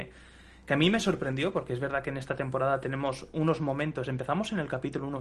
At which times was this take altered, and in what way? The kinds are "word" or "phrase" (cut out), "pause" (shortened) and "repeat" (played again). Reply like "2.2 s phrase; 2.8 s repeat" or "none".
none